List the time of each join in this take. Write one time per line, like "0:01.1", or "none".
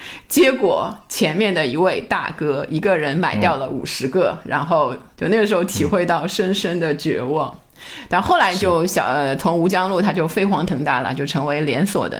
none